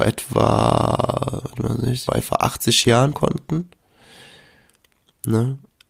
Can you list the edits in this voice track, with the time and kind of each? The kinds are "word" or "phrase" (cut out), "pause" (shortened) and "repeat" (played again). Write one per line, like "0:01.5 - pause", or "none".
0:02.1 - word
0:03.1 - word